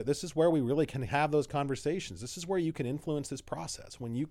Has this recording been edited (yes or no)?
no